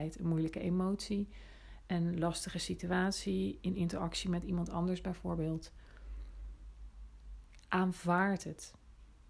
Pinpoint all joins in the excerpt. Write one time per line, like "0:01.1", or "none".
none